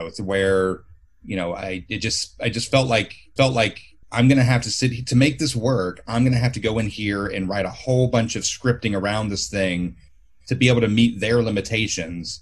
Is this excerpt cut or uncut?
cut